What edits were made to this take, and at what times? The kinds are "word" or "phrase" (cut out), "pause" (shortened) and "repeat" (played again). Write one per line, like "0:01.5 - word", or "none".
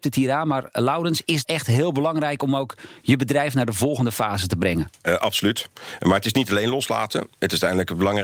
0:01.4 - phrase